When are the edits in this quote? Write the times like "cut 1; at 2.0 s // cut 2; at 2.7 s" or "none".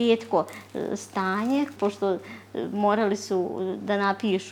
cut 1; at 1.8 s